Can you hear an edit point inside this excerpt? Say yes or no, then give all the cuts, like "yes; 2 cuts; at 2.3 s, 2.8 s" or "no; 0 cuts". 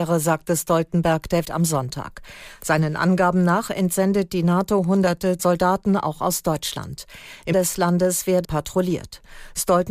yes; 4 cuts; at 1.4 s, 5.4 s, 7.5 s, 8.4 s